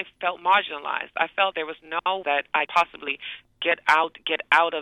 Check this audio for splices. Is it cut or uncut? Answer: cut